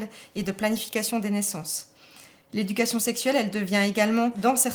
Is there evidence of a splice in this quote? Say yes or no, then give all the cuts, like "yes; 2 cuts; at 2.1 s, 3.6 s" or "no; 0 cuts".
no; 0 cuts